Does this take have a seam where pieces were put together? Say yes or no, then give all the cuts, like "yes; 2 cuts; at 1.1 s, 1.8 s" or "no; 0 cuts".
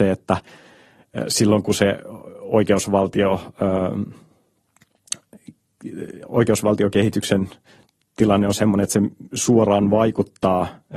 no; 0 cuts